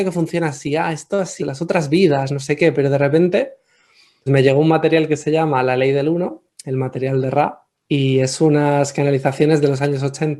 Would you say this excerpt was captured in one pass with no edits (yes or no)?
no